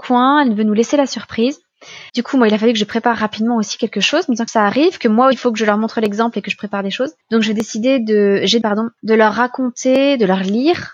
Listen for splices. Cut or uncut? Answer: cut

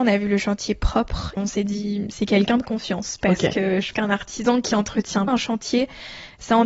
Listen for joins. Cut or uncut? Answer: cut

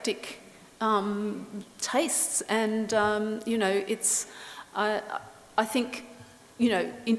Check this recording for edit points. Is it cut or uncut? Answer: uncut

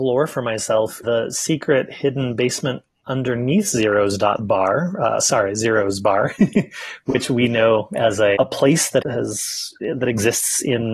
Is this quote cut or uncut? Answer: cut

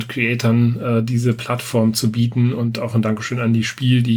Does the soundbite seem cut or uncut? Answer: uncut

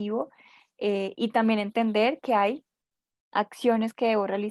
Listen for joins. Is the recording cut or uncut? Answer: uncut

